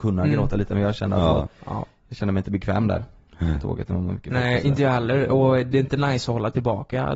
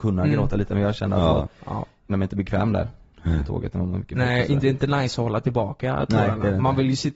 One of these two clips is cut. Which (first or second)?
second